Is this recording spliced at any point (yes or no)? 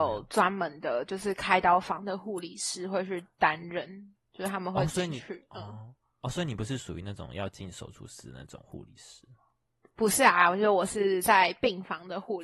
no